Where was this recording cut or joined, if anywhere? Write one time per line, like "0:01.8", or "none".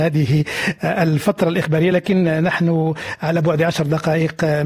none